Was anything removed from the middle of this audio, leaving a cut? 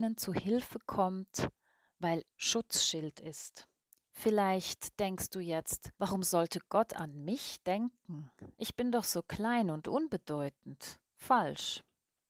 yes; 4 cuts; at 2.3 s, 3.9 s, 5.9 s, 11.1 s

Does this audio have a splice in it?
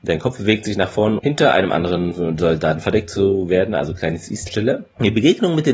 yes; 2 cuts; at 1.2 s, 4.5 s

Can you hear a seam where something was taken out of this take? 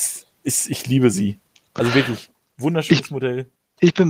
no; 0 cuts

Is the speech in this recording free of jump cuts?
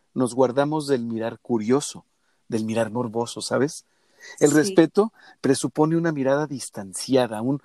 yes; 0 cuts

